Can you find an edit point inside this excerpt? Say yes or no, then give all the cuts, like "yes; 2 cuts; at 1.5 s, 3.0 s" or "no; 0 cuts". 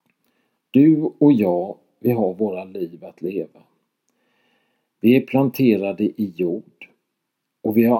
no; 0 cuts